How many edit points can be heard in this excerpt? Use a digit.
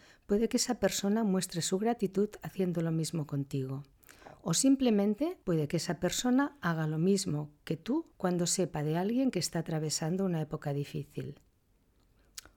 2